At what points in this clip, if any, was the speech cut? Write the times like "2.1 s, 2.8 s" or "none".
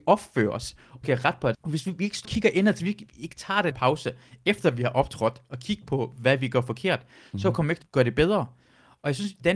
1.0 s, 1.5 s, 2.2 s, 2.8 s, 3.7 s, 7.8 s